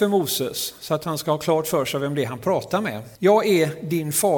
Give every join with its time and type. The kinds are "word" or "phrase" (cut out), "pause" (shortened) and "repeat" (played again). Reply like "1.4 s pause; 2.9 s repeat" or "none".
3.2 s pause